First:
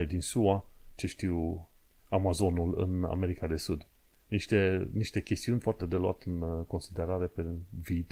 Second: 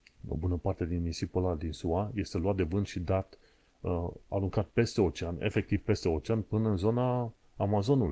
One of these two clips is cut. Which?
first; 2 cuts; at 1.0 s, 5.8 s

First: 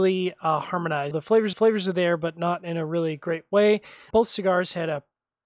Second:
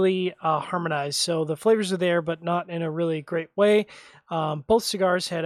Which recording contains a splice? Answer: first; 3 cuts; at 1.1 s, 1.5 s, 4.1 s

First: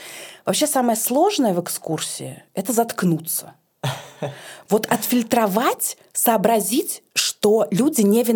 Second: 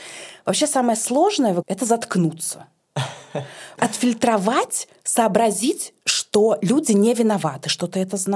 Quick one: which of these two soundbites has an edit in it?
second; 2 cuts; at 1.6 s, 3.8 s

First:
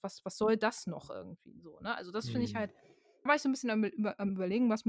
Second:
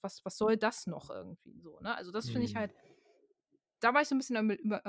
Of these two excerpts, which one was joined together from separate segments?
first; 1 cut; at 3.3 s

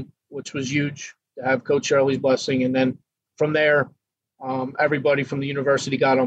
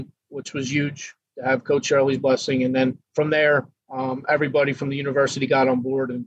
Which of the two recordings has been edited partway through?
second; 2 cuts; at 3.0 s, 3.8 s

